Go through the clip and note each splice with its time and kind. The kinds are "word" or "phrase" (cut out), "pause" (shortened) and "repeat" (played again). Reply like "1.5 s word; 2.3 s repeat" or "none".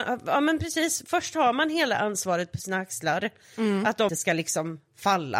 4.1 s word